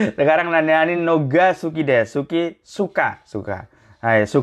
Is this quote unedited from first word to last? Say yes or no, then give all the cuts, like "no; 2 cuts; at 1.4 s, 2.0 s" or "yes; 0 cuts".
yes; 0 cuts